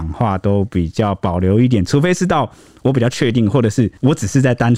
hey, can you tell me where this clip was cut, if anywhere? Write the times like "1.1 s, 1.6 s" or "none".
none